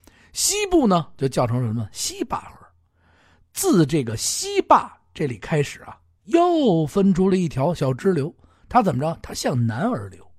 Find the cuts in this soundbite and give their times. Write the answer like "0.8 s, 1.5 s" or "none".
none